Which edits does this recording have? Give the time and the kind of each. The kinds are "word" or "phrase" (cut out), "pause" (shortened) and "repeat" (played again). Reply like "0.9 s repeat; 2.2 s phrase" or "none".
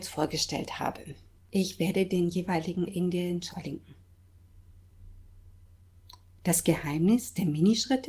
1.4 s pause; 2.9 s word; 3.5 s word